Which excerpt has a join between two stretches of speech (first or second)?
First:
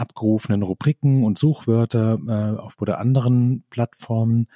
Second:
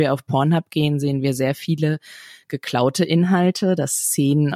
first